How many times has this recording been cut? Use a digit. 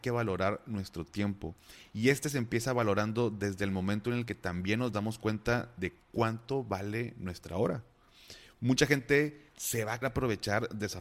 2